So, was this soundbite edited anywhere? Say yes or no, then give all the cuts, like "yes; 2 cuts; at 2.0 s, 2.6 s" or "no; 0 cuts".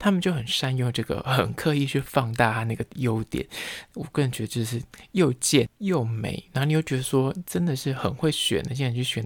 yes; 1 cut; at 5.7 s